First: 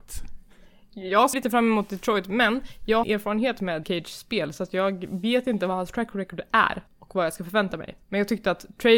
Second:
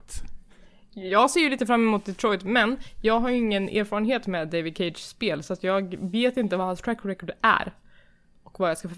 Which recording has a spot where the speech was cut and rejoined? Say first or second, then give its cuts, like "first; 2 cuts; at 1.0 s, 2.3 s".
first; 5 cuts; at 1.3 s, 3.0 s, 3.8 s, 6.9 s, 8.0 s